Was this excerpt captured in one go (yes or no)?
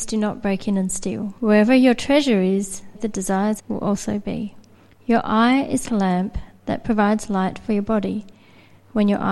no